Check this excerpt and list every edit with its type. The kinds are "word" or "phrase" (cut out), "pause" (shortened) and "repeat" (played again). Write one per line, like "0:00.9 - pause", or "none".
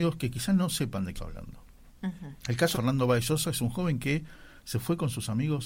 0:01.2 - phrase
0:02.4 - pause
0:02.7 - word

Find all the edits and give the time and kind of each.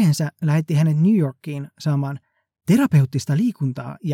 none

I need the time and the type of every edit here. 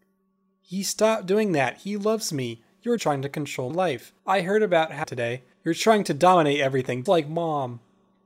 0:03.0 - word
0:03.7 - word
0:04.2 - pause
0:05.0 - phrase
0:05.5 - pause
0:07.1 - word

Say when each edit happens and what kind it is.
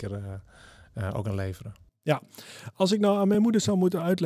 none

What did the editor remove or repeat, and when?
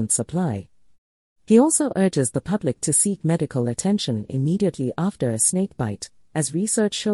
none

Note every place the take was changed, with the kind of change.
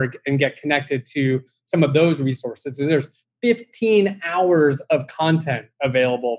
none

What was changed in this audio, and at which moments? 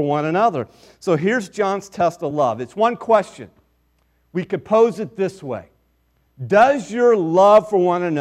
none

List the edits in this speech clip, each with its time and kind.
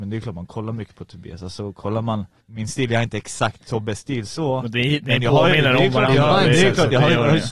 0:02.4 - pause

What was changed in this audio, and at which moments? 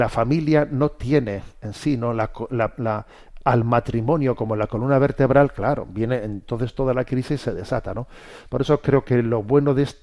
none

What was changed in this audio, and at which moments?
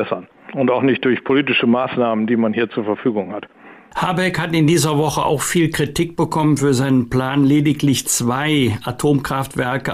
none

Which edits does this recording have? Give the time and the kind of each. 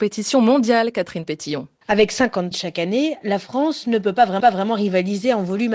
0:01.8 - pause
0:02.5 - phrase
0:04.4 - repeat

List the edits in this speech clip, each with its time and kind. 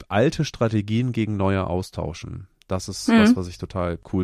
none

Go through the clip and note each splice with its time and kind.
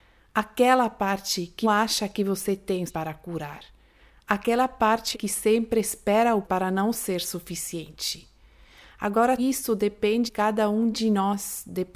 0:01.6 - word
0:02.9 - word
0:05.1 - phrase
0:06.4 - word
0:09.4 - word
0:10.3 - word

